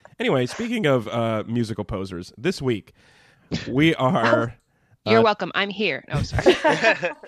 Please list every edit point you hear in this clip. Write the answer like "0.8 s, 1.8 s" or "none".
none